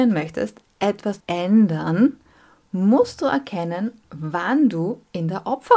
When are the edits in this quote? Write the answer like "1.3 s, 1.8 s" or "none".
1.2 s